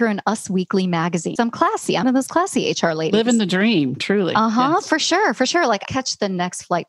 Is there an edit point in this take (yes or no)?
yes